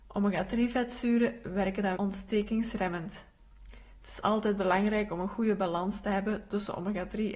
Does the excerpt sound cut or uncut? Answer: cut